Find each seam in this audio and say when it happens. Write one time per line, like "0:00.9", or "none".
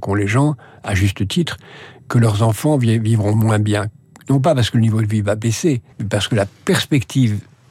0:05.9
0:06.5